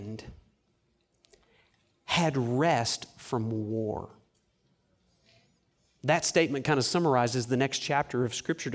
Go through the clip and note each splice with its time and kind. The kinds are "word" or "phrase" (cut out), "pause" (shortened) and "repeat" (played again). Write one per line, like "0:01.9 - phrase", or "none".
none